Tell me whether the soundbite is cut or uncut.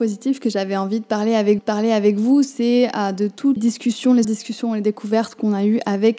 cut